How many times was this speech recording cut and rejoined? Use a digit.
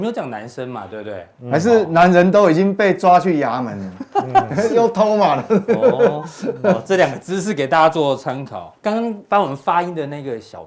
1